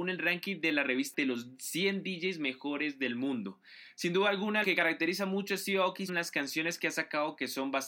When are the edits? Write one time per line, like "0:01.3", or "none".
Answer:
0:01.1
0:04.6
0:06.1